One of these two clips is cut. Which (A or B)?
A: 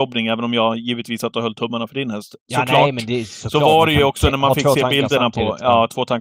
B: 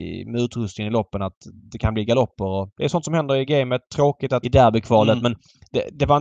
B